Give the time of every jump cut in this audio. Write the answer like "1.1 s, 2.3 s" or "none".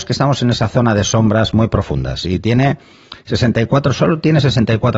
none